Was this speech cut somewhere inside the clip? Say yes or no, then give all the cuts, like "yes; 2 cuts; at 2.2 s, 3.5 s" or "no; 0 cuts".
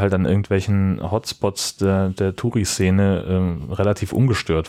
no; 0 cuts